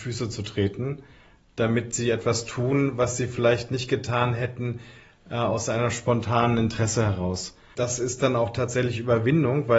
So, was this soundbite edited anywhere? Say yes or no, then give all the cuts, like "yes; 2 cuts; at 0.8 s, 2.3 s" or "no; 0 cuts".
no; 0 cuts